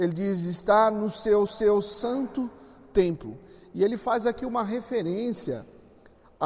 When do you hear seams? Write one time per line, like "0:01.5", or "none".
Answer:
0:01.5